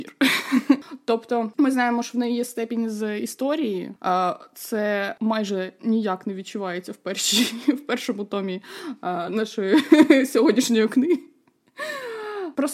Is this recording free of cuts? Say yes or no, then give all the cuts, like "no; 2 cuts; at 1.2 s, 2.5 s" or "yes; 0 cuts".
yes; 0 cuts